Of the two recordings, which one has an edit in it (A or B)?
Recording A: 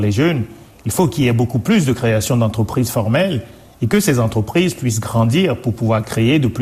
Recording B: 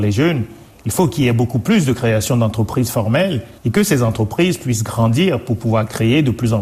B